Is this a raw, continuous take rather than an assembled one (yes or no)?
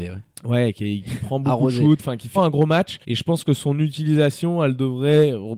no